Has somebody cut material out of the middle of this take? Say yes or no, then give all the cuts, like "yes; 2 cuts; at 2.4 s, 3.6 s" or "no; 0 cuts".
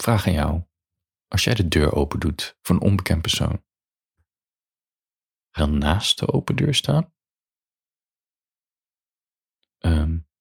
yes; 1 cut; at 5.6 s